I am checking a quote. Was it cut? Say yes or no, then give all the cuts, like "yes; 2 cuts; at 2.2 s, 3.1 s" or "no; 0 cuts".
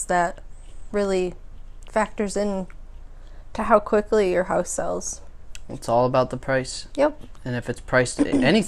no; 0 cuts